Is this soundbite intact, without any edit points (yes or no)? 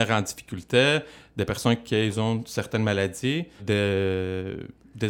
no